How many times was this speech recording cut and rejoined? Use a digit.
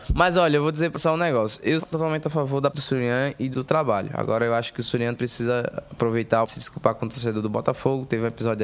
6